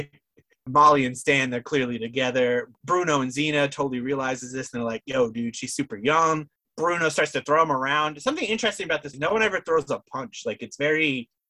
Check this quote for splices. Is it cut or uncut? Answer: cut